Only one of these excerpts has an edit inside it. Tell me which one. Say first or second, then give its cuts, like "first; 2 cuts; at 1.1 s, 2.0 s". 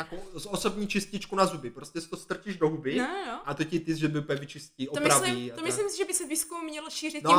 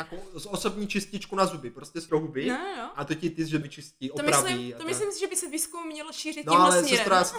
second; 2 cuts; at 2.1 s, 3.6 s